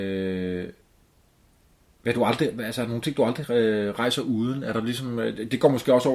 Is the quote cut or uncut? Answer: uncut